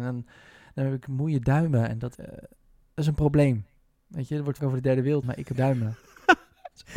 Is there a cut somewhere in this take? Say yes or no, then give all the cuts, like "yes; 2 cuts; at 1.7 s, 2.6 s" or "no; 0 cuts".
yes; 4 cuts; at 2.1 s, 4.6 s, 5.2 s, 5.5 s